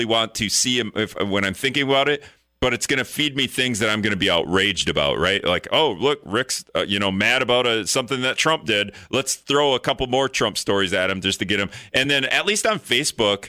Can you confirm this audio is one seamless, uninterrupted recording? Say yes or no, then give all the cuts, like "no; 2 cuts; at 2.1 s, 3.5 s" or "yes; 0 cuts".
yes; 0 cuts